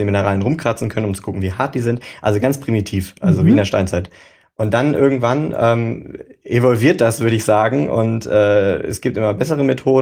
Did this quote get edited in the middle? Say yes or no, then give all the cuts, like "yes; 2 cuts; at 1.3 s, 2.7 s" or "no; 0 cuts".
no; 0 cuts